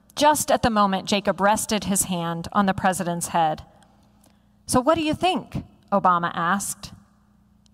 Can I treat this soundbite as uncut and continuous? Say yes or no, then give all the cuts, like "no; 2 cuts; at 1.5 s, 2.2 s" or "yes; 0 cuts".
yes; 0 cuts